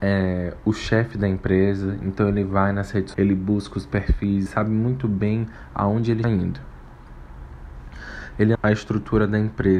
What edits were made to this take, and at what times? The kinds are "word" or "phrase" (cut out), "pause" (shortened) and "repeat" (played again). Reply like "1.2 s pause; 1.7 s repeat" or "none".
3.1 s word; 4.5 s word; 6.2 s word; 8.5 s word